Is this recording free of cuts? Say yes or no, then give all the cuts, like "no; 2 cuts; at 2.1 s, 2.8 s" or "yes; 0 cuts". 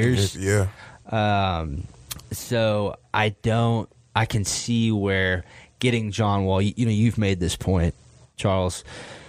yes; 0 cuts